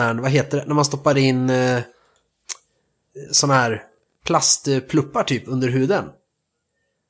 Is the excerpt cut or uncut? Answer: uncut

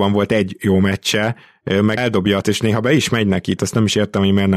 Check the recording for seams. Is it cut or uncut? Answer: cut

